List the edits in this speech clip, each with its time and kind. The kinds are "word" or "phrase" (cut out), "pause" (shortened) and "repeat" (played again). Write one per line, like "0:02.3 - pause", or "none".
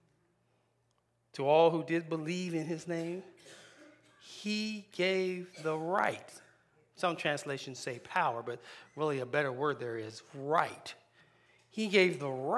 none

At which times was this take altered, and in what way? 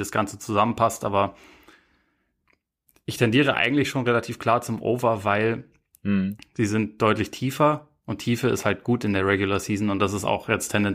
none

